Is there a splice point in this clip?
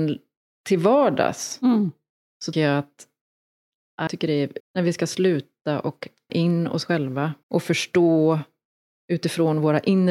yes; 5 cuts; at 2.5 s, 4.1 s, 4.6 s, 6.3 s, 7.4 s

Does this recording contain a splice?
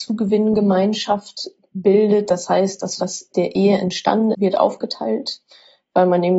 yes; 3 cuts; at 3.0 s, 3.3 s, 4.3 s

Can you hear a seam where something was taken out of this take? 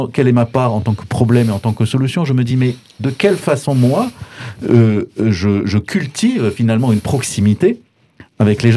no; 0 cuts

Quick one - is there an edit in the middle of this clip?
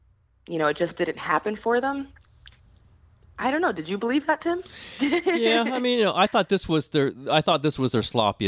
no; 0 cuts

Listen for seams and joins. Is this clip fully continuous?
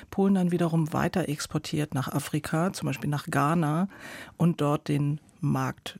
yes; 0 cuts

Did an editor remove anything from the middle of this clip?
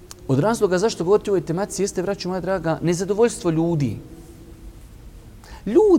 no; 0 cuts

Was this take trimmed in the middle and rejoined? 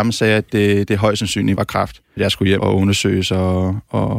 yes; 3 cuts; at 1.6 s, 2.2 s, 2.6 s

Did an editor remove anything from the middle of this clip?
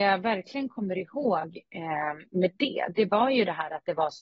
no; 0 cuts

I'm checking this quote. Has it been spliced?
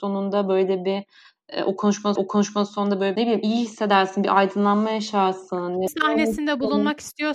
yes; 3 cuts; at 2.2 s, 3.2 s, 5.9 s

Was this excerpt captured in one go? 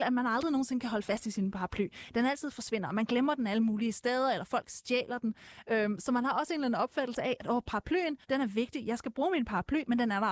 no; 1 cut; at 8.2 s

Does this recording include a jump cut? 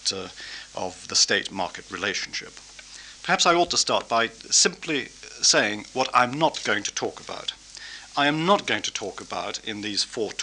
no; 0 cuts

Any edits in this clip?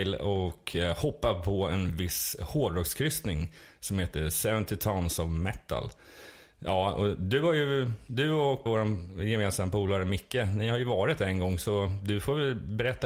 yes; 1 cut; at 8.7 s

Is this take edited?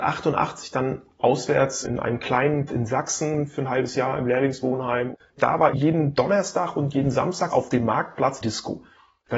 yes; 5 cuts; at 1.8 s, 2.7 s, 5.7 s, 7.5 s, 8.4 s

